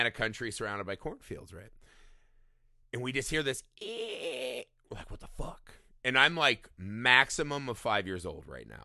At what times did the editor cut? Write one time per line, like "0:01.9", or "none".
none